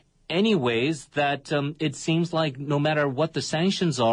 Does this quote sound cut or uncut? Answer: uncut